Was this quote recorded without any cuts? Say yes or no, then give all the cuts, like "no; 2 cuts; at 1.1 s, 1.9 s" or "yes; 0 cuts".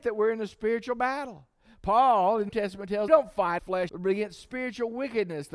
no; 4 cuts; at 2.5 s, 3.1 s, 3.6 s, 3.9 s